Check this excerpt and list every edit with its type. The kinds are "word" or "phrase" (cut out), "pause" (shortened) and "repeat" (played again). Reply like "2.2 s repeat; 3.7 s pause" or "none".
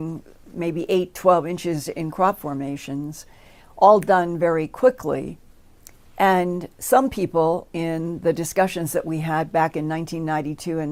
none